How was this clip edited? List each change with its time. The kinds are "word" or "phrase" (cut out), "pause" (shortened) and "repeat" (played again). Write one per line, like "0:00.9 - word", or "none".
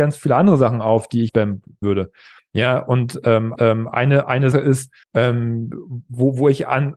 0:01.3 - word
0:01.8 - word
0:03.6 - repeat
0:04.5 - word
0:05.0 - pause